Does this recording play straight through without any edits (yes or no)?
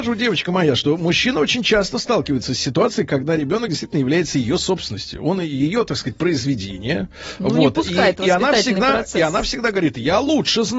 yes